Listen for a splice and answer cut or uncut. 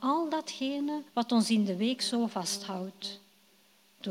cut